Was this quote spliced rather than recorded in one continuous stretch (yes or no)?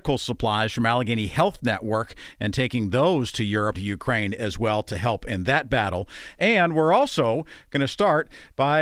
yes